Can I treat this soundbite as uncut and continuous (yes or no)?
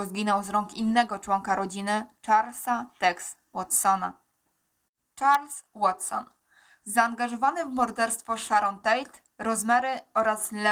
yes